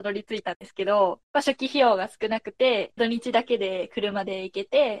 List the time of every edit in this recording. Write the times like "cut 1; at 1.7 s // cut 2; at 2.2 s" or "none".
cut 1; at 1.2 s // cut 2; at 3.0 s